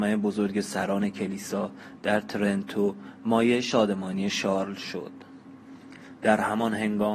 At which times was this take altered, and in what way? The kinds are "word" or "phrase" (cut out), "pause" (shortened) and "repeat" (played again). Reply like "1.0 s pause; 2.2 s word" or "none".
none